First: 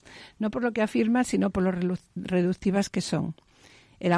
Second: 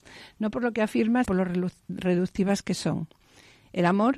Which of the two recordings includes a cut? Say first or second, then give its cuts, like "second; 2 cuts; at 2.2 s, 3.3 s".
second; 1 cut; at 1.2 s